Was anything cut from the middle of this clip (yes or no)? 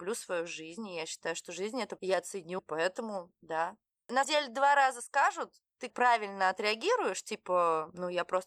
yes